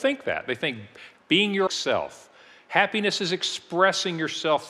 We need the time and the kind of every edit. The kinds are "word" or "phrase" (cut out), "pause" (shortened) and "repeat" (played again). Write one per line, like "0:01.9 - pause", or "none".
0:01.1 - phrase
0:01.7 - word